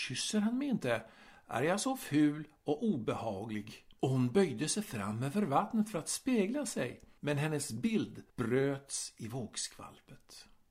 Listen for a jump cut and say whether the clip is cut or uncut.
cut